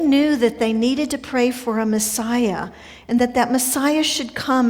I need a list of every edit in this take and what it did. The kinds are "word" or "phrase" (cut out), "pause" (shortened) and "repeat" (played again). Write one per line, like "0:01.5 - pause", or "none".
none

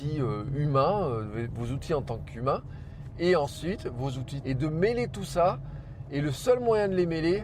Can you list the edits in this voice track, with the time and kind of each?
0:04.4 - word

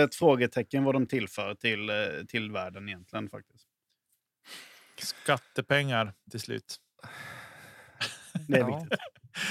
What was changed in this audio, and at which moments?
none

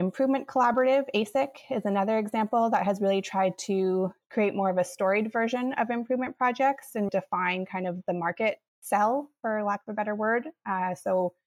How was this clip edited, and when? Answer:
0:07.1 - word
0:08.7 - word

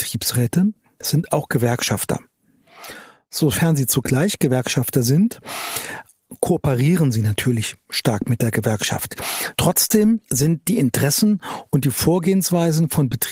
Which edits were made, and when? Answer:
none

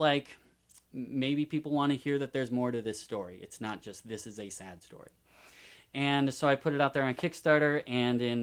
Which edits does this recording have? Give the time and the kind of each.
none

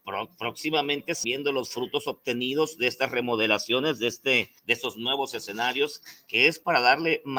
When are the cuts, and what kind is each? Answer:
0:01.2 - word
0:04.6 - pause

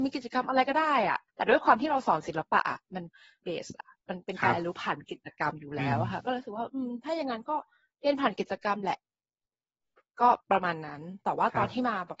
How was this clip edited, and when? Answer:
0:01.3 - pause
0:03.4 - word
0:10.4 - pause

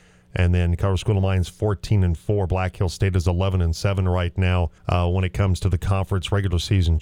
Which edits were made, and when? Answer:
0:04.8 - pause

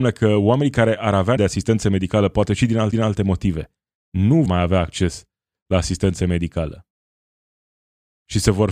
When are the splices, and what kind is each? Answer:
0:01.4 - word
0:02.9 - repeat
0:04.5 - word

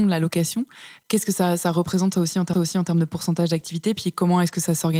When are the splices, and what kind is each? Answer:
0:02.5 - repeat

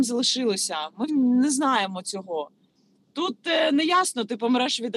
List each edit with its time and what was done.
0:01.1 - word

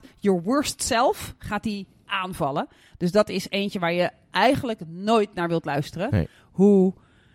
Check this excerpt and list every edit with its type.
none

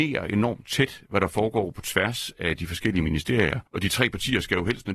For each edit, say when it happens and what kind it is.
0:03.7 - pause

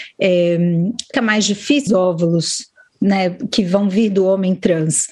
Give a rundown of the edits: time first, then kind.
0:01.1 - word
0:01.9 - phrase

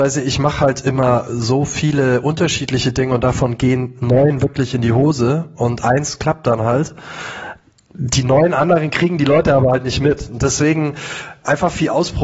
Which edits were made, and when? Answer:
none

